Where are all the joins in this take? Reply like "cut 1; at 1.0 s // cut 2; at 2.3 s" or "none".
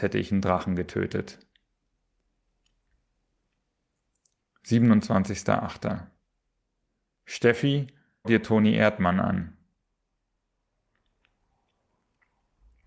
cut 1; at 8.2 s